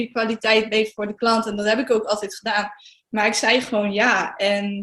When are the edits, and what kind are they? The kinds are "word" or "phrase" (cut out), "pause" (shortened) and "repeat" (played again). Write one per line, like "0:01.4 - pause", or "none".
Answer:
none